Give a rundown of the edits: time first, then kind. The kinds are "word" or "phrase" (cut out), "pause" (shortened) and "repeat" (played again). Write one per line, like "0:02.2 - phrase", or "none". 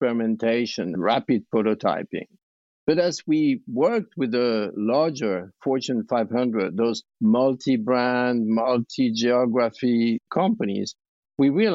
0:00.9 - word